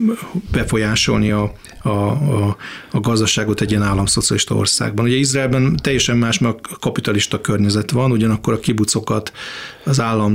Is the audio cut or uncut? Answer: uncut